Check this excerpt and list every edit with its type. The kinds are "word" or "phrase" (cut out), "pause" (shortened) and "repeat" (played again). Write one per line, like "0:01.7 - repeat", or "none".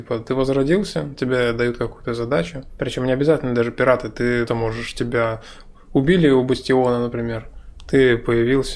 0:04.5 - word